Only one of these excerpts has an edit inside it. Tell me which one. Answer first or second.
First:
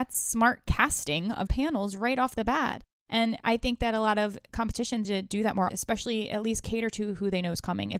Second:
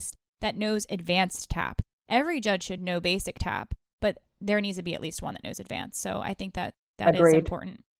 first